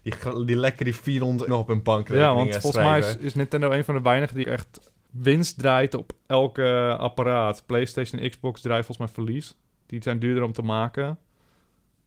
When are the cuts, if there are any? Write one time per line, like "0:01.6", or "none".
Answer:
0:01.5
0:04.4
0:06.2